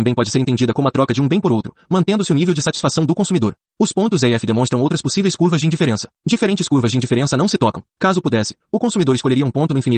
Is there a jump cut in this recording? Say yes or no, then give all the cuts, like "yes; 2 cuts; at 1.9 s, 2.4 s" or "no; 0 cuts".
yes; 3 cuts; at 3.7 s, 6.2 s, 7.9 s